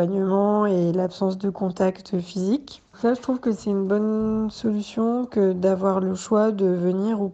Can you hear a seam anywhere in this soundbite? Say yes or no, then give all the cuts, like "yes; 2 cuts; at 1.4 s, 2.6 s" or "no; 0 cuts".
yes; 1 cut; at 2.9 s